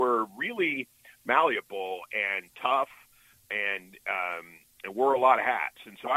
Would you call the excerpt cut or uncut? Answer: uncut